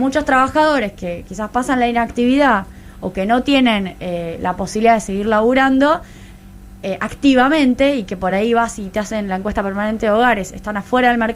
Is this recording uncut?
yes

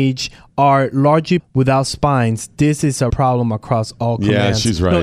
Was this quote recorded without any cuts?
no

